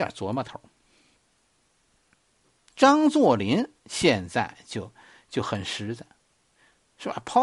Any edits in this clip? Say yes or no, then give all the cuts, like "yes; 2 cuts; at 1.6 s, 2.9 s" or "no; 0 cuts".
no; 0 cuts